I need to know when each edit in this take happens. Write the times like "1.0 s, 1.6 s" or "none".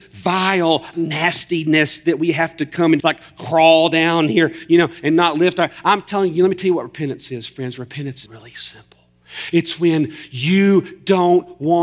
0.9 s, 3.0 s, 8.3 s